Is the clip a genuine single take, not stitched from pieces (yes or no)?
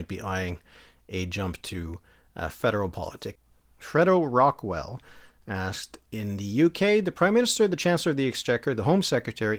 yes